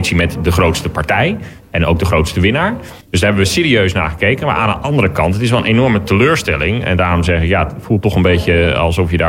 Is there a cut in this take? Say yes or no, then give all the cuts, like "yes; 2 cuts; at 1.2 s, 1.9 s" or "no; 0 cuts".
yes; 1 cut; at 3.0 s